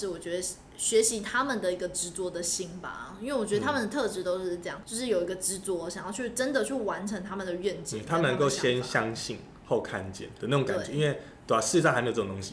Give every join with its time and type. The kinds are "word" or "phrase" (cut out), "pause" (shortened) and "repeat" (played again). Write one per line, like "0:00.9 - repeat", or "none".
0:04.8 - word

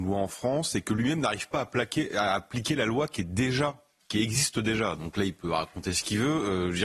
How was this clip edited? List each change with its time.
none

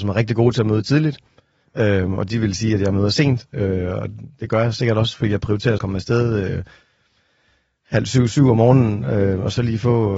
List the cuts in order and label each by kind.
0:05.8 - phrase

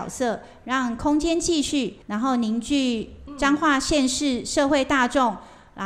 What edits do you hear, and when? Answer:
0:02.0 - pause

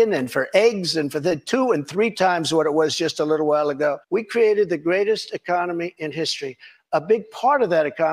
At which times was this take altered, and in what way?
0:04.0 - pause

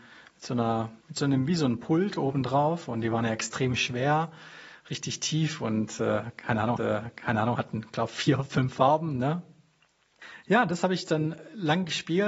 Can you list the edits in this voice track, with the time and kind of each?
0:01.0 - pause
0:06.8 - repeat

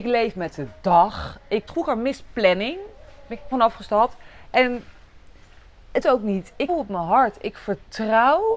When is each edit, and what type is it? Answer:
0:01.7 - word
0:03.5 - word
0:06.0 - word
0:06.7 - word

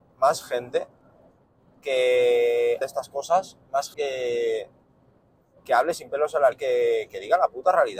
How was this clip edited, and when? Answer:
0:02.8 - word
0:03.9 - word
0:06.5 - word

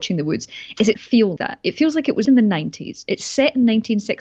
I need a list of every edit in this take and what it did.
0:00.9 - word
0:01.4 - word
0:02.2 - word

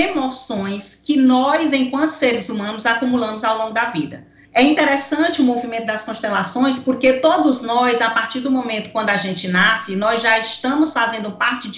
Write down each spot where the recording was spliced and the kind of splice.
0:04.4 - pause

